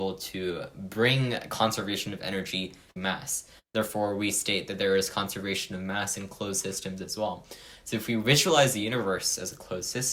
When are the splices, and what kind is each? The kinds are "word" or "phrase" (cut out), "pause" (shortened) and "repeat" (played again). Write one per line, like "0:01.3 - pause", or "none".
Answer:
0:03.0 - word